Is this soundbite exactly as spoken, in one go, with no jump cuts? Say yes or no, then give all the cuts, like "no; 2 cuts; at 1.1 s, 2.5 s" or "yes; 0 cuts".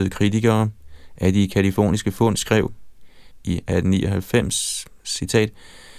yes; 0 cuts